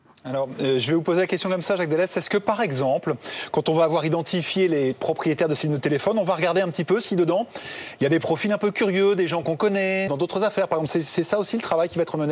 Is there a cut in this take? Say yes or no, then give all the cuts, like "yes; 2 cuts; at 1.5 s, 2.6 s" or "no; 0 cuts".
yes; 3 cuts; at 4.9 s, 9.4 s, 10.1 s